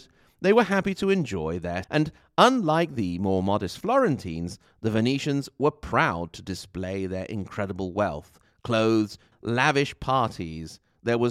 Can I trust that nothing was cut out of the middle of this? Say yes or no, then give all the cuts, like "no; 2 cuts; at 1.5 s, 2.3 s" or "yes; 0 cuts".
no; 2 cuts; at 1.8 s, 9.3 s